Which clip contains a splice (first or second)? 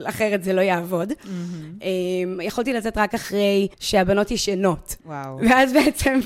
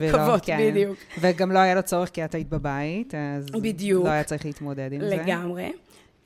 first